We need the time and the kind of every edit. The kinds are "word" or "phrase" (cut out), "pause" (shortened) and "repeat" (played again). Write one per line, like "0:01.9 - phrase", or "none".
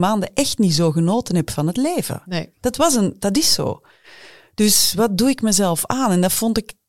none